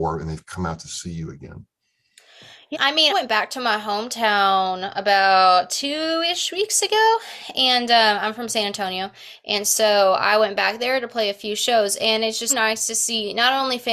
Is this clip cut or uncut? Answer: cut